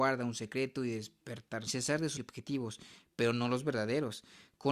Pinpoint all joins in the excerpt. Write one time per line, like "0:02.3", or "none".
0:01.7
0:02.2